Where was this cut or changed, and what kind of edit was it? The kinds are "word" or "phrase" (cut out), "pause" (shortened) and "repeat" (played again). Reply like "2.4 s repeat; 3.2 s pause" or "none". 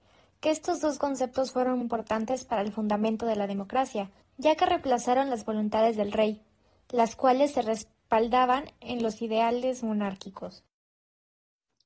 1.8 s word; 4.2 s pause